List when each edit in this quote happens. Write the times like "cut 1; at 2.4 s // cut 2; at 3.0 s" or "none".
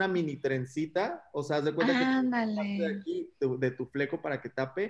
none

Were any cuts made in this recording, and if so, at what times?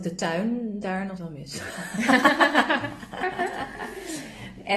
cut 1; at 1.2 s

